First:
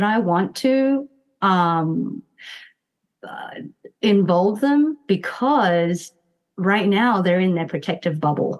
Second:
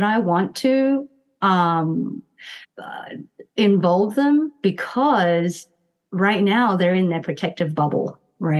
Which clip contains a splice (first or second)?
second